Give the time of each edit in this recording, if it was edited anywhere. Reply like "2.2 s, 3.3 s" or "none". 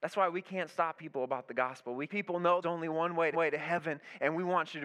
1.0 s, 2.1 s, 2.6 s, 3.3 s

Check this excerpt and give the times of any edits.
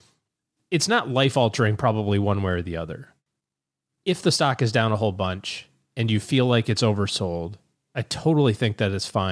none

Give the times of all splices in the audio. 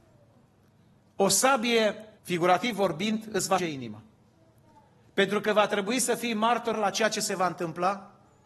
2.2 s, 3.6 s, 6.7 s

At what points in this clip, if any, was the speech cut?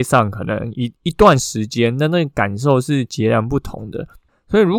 none

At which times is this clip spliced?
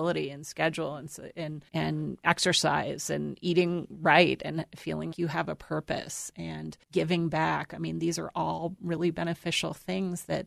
1.7 s, 5.1 s, 6.8 s

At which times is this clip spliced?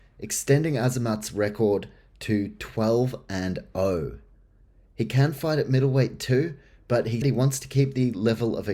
7.2 s

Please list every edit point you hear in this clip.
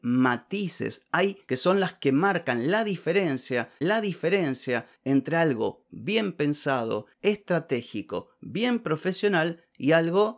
1.5 s, 3.8 s

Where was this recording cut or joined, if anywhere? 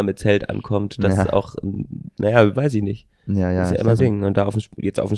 2.6 s, 4.0 s

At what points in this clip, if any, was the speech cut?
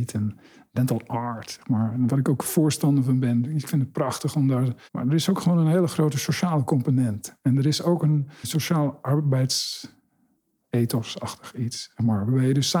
4.9 s, 8.4 s

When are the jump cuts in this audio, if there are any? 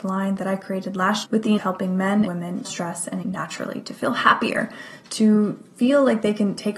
1.2 s, 1.6 s, 2.2 s, 2.6 s, 3.2 s, 3.9 s

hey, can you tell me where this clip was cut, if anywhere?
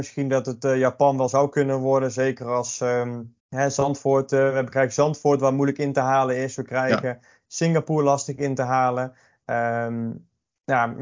3.4 s

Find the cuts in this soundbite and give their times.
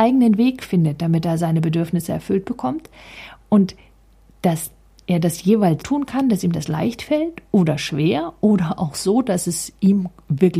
5.8 s

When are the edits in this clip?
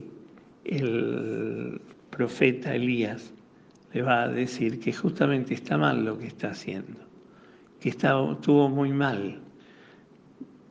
none

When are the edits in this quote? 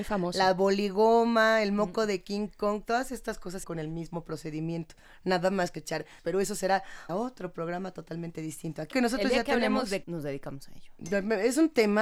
3.6 s, 5.7 s, 6.2 s, 7.1 s, 8.9 s, 10.0 s

